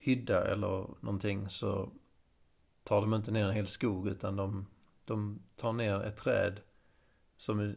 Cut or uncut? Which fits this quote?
uncut